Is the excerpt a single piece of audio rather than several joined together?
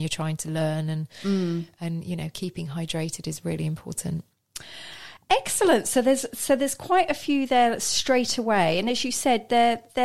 yes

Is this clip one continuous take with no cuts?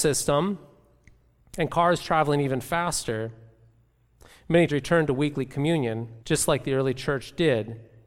no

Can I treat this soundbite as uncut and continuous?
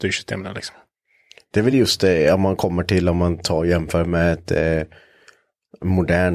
yes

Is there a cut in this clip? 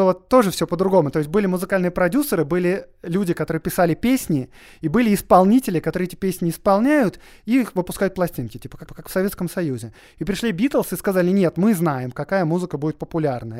yes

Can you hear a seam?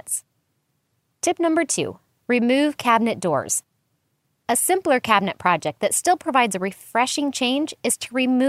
no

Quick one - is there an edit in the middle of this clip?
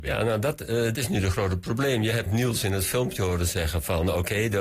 yes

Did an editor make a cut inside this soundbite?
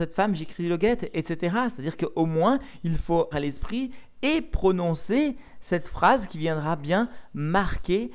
yes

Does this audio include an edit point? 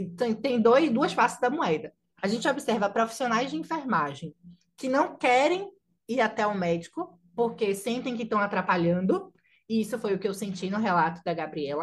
no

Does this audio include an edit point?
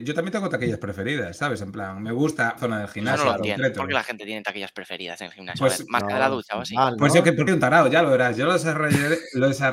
yes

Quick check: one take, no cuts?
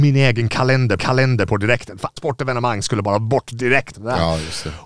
no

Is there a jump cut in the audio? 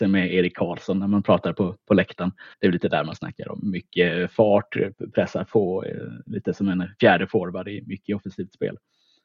yes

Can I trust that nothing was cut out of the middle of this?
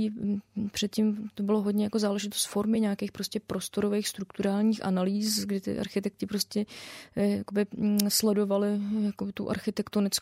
yes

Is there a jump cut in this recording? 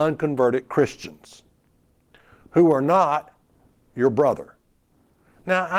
no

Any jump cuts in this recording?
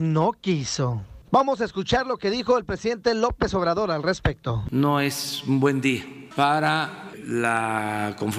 no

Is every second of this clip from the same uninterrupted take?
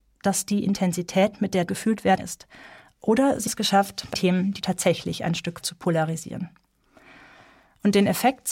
no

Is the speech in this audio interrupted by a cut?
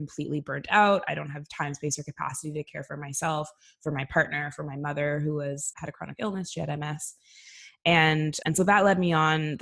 yes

